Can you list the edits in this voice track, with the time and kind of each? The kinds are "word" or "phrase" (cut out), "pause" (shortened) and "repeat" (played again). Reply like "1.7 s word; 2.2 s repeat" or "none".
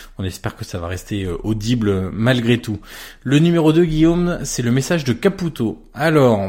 none